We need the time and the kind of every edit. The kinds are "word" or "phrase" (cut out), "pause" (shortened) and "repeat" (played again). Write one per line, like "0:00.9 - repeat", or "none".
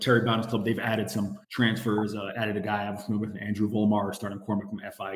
0:01.4 - pause